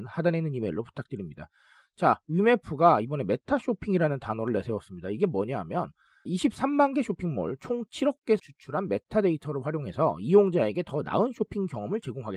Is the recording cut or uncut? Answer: cut